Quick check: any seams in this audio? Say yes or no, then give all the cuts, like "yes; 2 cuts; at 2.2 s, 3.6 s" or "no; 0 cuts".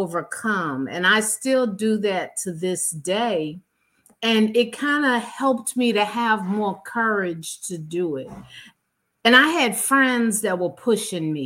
no; 0 cuts